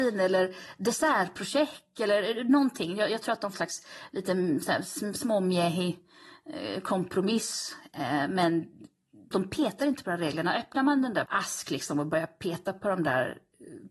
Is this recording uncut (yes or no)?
no